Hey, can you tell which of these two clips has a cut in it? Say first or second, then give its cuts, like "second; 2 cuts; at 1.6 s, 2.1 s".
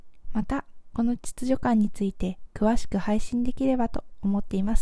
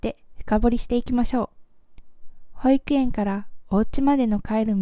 second; 1 cut; at 1.8 s